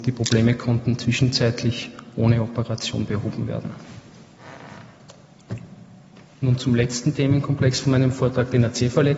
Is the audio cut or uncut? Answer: uncut